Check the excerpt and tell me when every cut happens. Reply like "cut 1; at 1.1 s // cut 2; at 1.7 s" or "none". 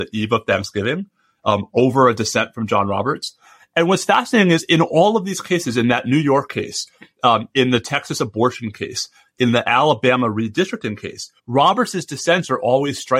cut 1; at 11.4 s